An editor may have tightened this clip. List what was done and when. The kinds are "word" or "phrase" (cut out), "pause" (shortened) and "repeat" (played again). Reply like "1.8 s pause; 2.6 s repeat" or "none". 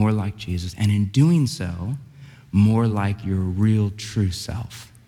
none